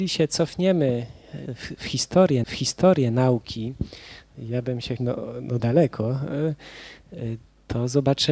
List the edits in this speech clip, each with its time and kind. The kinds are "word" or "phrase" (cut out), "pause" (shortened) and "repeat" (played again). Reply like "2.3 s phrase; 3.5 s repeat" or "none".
2.4 s repeat; 5.0 s phrase; 5.6 s word